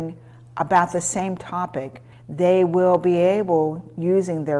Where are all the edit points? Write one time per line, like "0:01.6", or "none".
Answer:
0:02.1